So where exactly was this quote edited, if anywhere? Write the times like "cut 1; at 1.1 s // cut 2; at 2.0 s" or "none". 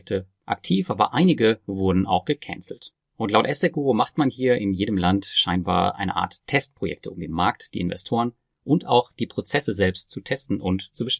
none